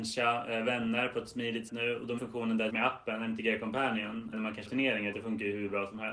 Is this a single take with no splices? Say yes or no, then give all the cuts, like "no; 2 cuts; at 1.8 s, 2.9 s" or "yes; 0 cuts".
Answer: no; 6 cuts; at 1.7 s, 2.2 s, 2.7 s, 4.3 s, 4.7 s, 5.1 s